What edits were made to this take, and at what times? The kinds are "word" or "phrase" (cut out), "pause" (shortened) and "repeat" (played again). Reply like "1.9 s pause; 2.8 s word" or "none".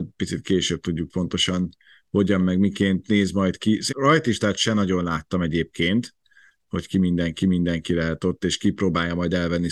1.1 s phrase; 3.9 s word; 7.4 s repeat

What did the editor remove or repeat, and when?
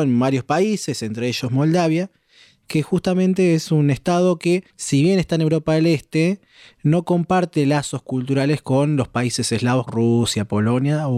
4.7 s pause; 9.9 s word

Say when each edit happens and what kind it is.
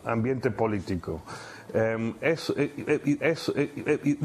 3.2 s repeat

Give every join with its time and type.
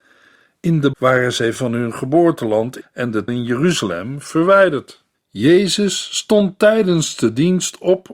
0.9 s word; 1.6 s word; 2.8 s word; 3.3 s word; 5.1 s pause

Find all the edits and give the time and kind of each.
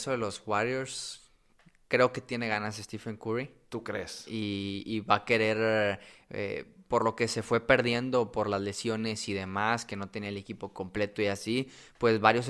none

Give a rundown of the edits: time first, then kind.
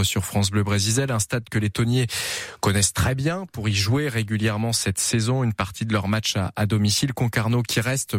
none

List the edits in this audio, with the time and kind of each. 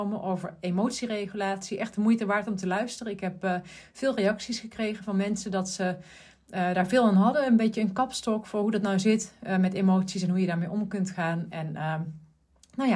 none

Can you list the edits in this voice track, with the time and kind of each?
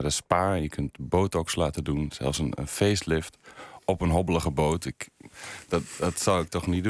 none

